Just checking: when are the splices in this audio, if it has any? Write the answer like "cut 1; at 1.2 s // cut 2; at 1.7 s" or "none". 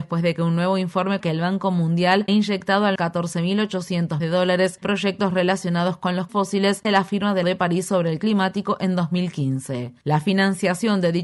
cut 1; at 1.2 s // cut 2; at 2.3 s // cut 3; at 3.0 s // cut 4; at 4.2 s // cut 5; at 4.8 s // cut 6; at 6.3 s // cut 7; at 6.8 s // cut 8; at 7.4 s // cut 9; at 8.2 s